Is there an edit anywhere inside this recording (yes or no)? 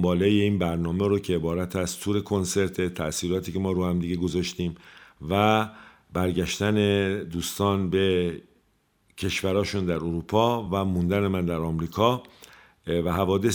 no